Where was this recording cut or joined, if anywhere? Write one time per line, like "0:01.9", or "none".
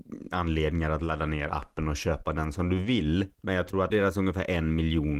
0:03.3
0:03.9

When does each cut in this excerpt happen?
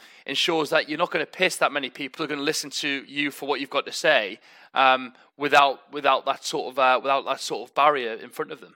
0:02.2

